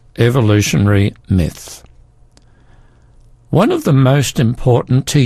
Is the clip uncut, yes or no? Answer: yes